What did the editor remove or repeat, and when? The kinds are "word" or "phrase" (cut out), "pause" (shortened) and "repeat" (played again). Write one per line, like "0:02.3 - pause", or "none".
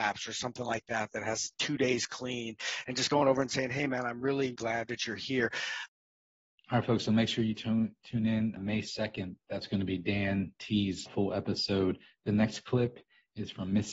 0:04.5 - word
0:08.6 - word
0:11.1 - word